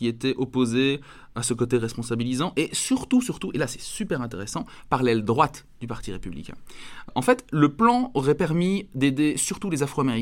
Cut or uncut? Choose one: uncut